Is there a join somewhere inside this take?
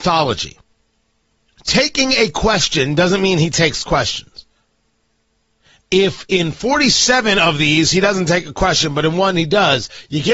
no; 0 cuts

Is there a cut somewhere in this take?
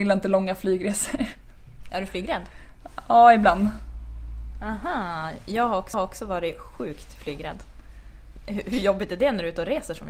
yes; 1 cut; at 5.9 s

